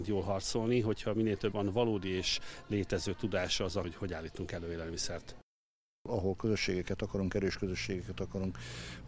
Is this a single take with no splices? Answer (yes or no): no